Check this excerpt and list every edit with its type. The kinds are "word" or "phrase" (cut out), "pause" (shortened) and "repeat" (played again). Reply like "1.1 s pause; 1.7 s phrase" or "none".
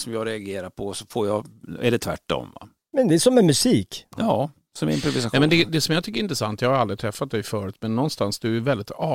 none